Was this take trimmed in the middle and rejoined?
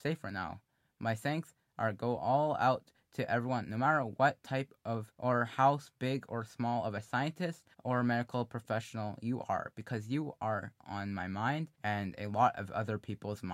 yes; 3 cuts; at 5.1 s, 7.7 s, 11.7 s

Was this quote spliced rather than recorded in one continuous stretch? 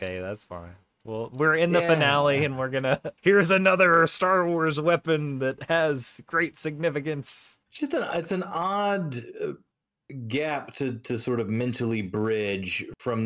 yes; 2 cuts; at 3.2 s, 7.6 s

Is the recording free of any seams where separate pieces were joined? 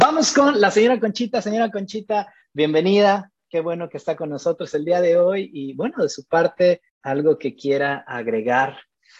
no; 1 cut; at 6.9 s

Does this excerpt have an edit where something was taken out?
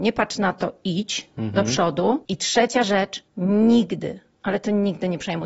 yes; 1 cut; at 3.3 s

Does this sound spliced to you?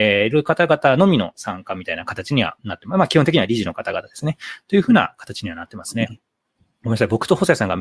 no; 0 cuts

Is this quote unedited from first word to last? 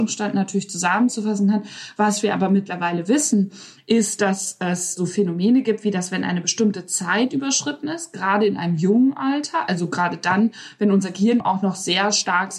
no; 1 cut; at 11.4 s

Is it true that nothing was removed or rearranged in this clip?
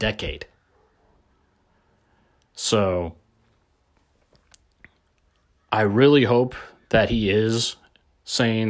yes; 0 cuts

